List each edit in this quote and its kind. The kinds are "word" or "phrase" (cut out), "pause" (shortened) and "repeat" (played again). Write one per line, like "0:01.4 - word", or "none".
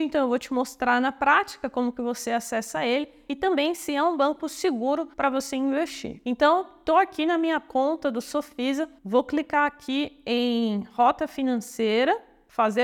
0:05.1 - pause
0:09.0 - pause